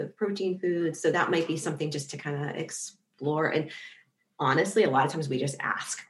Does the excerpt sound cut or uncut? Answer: uncut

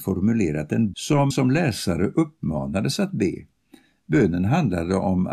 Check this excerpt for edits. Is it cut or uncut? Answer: cut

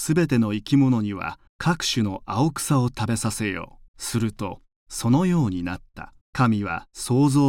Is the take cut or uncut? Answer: cut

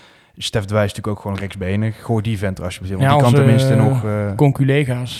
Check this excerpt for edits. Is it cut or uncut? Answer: uncut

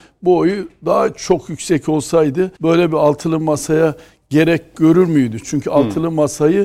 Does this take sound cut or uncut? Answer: cut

